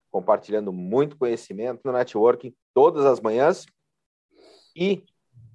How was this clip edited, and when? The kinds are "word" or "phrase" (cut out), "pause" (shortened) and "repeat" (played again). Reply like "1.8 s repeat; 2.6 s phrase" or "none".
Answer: 1.8 s word; 2.6 s pause